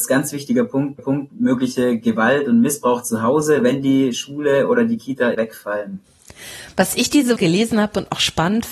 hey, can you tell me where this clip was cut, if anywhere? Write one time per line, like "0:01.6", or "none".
0:01.0
0:05.3
0:07.4